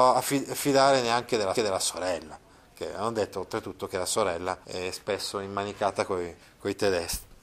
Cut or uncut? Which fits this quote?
cut